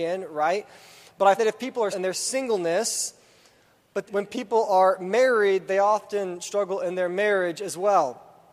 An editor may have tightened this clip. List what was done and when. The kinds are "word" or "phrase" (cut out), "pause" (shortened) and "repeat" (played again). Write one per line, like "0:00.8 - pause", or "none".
0:01.4 - word
0:01.9 - phrase
0:04.1 - word